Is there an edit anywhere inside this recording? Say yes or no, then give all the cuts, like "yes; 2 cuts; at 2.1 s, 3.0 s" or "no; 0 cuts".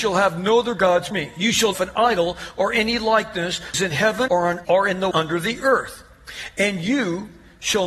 yes; 6 cuts; at 1.1 s, 1.7 s, 3.7 s, 4.3 s, 4.6 s, 5.1 s